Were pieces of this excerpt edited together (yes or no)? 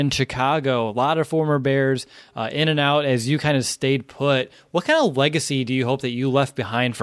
no